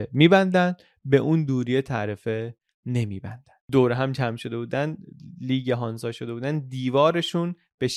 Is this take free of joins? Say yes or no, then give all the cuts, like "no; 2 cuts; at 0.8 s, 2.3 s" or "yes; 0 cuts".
yes; 0 cuts